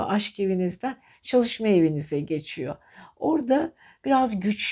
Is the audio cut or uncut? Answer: uncut